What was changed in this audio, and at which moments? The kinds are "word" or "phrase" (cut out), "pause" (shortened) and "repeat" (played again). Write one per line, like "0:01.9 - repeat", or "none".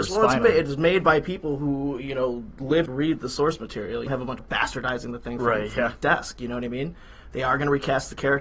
0:02.9 - word
0:04.1 - word
0:04.4 - phrase